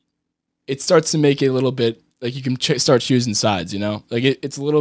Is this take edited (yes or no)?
yes